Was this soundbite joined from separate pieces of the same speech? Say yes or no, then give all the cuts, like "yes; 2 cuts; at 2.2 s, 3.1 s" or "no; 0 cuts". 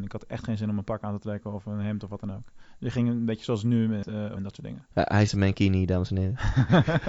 yes; 3 cuts; at 4.0 s, 4.4 s, 5.3 s